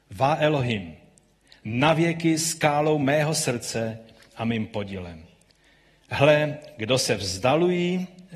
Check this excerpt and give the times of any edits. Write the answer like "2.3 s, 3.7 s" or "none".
none

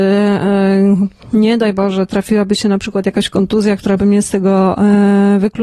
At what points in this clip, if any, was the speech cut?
none

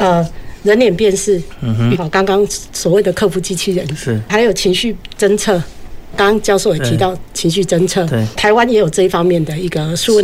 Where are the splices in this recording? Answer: 2.0 s, 4.3 s, 6.1 s, 8.4 s

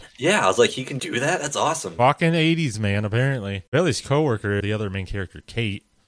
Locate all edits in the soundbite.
1.0 s, 3.7 s, 4.6 s

